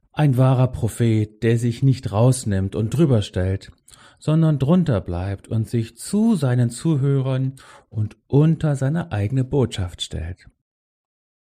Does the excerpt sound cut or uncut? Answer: uncut